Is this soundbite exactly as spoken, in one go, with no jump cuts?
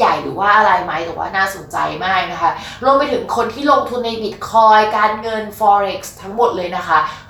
yes; 0 cuts

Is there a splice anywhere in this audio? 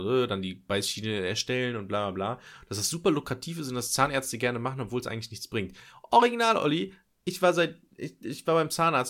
no; 0 cuts

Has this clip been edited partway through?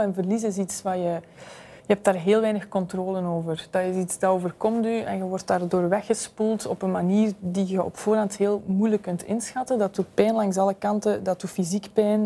yes; 1 cut; at 1.8 s

